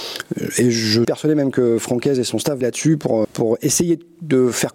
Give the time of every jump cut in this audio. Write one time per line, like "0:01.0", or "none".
0:01.0
0:02.6
0:03.2